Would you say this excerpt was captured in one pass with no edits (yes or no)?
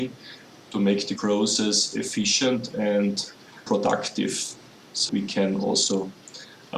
no